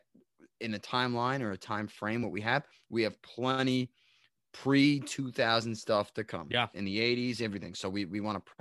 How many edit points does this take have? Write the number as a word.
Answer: zero